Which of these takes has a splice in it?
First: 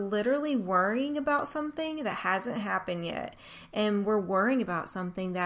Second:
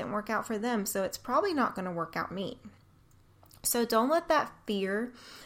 second; 1 cut; at 2.3 s

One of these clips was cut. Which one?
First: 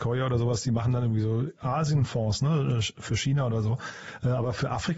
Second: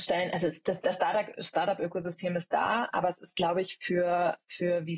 second; 1 cut; at 2.9 s

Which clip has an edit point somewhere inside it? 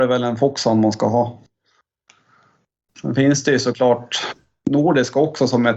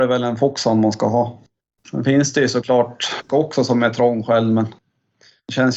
second; 2 cuts; at 1.6 s, 3.3 s

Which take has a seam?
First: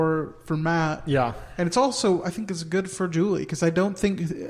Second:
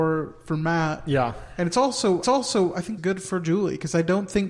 second; 2 cuts; at 2.2 s, 3.0 s

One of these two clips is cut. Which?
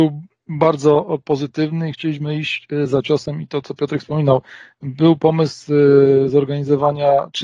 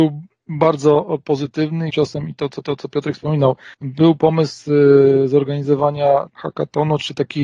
second; 4 cuts; at 1.9 s, 2.6 s, 3.7 s, 6.3 s

